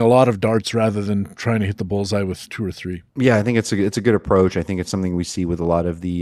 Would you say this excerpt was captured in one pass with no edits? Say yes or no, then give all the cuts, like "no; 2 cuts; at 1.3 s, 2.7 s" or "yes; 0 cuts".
no; 1 cut; at 3.1 s